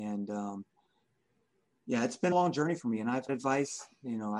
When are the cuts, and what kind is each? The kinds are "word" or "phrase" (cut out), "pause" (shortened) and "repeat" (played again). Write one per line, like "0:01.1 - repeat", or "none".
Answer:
0:02.3 - phrase
0:03.3 - phrase

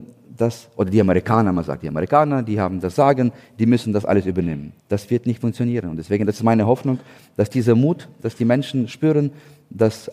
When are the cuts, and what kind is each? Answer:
0:04.8 - pause

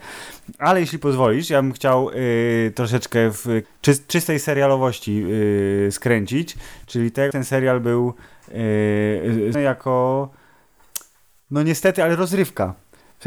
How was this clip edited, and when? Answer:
0:03.6 - word
0:07.3 - word
0:09.5 - word

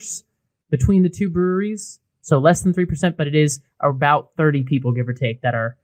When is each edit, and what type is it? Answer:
none

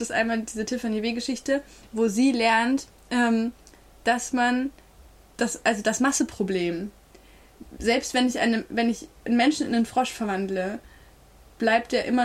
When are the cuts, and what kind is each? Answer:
none

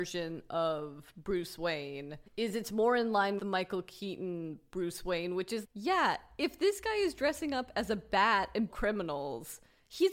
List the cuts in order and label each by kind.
0:02.3 - pause
0:03.4 - word
0:05.6 - word
0:08.7 - phrase

